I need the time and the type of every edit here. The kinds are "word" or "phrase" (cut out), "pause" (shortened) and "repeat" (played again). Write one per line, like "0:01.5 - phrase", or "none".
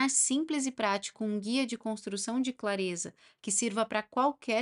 none